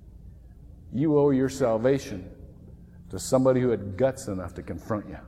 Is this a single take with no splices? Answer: yes; 0 cuts

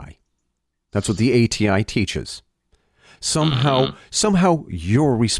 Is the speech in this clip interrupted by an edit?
no; 0 cuts

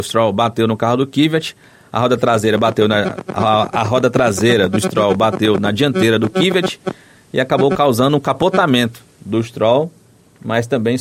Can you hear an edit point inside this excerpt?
no; 0 cuts

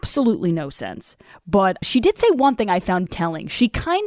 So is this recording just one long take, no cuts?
no; 2 cuts; at 1.8 s, 3.1 s

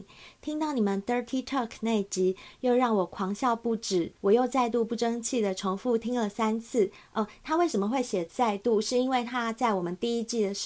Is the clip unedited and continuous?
no; 1 cut; at 4.2 s

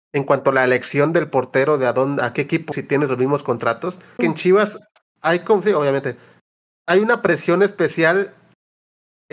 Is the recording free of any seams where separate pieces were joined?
no; 2 cuts; at 2.7 s, 4.2 s

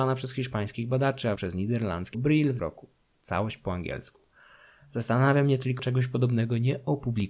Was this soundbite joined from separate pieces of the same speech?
yes; 4 cuts; at 1.4 s, 2.1 s, 2.6 s, 5.8 s

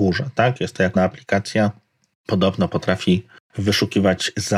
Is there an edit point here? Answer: yes; 1 cut; at 1.0 s

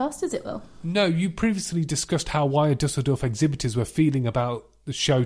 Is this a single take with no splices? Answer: yes; 0 cuts

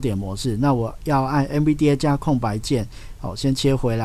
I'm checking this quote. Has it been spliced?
no; 0 cuts

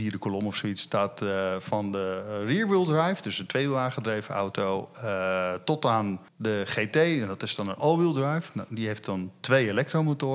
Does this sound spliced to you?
yes; 1 cut; at 6.3 s

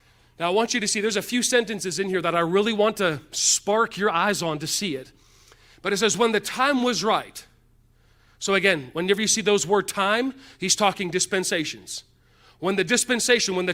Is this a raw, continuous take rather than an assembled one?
yes; 0 cuts

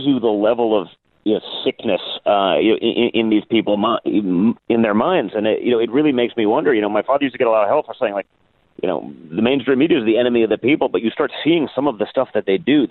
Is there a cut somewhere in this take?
no; 0 cuts

